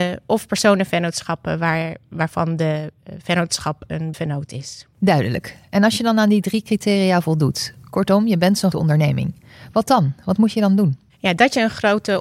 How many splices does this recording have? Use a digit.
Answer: 2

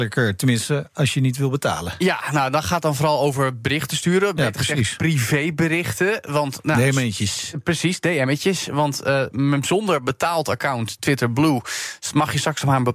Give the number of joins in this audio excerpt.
0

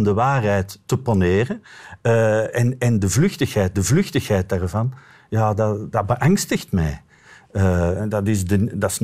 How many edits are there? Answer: 2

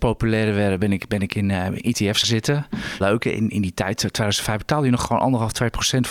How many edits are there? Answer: 2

